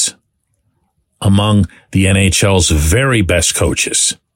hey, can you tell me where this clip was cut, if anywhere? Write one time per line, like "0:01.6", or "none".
none

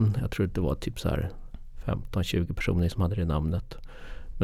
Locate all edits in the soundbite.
0:02.9

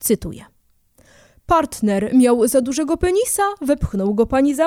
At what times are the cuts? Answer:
none

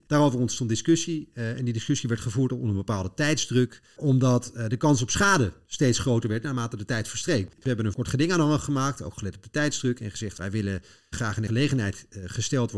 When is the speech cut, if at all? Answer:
0:07.6
0:11.1

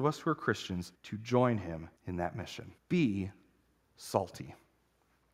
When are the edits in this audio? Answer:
0:00.9
0:02.0
0:02.8

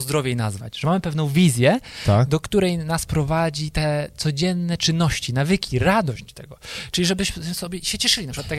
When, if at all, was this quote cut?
none

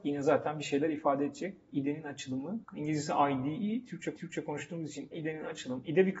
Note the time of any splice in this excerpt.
0:02.6
0:04.2
0:05.1

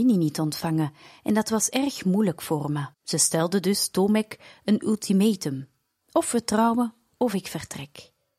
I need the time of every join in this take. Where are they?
0:02.9

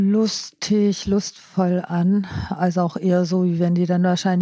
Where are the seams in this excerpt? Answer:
none

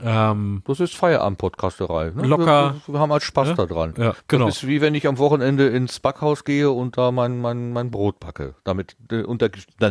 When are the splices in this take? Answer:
0:04.2

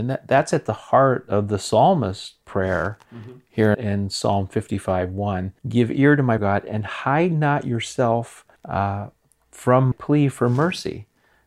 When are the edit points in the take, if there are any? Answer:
0:03.7
0:05.6
0:06.4
0:08.6
0:09.9

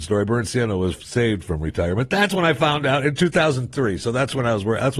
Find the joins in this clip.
none

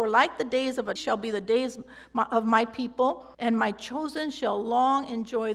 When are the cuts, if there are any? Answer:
0:01.0
0:03.3

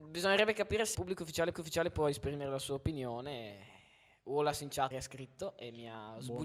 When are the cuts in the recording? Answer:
0:00.9
0:01.5
0:04.9

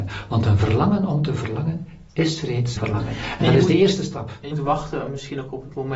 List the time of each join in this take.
0:02.8
0:04.5

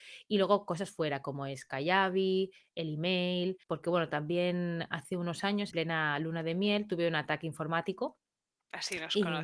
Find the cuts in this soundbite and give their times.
0:03.6
0:05.7

